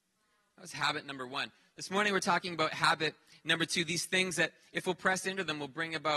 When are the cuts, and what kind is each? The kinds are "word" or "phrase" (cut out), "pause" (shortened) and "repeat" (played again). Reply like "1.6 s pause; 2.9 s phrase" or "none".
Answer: none